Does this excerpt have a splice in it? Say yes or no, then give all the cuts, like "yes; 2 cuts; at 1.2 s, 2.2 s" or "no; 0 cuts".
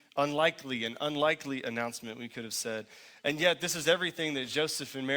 no; 0 cuts